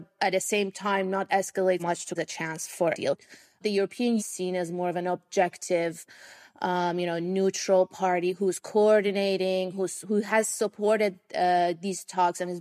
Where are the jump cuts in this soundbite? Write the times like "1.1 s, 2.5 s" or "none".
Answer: 1.8 s, 2.2 s, 2.9 s, 4.2 s